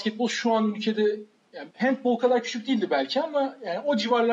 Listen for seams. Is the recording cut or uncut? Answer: cut